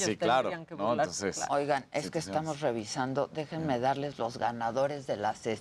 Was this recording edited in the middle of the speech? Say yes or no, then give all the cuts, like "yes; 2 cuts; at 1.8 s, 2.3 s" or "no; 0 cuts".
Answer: no; 0 cuts